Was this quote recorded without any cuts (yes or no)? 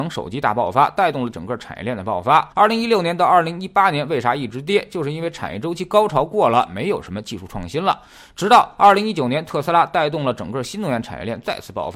no